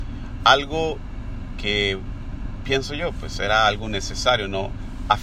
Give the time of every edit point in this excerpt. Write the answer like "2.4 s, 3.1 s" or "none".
none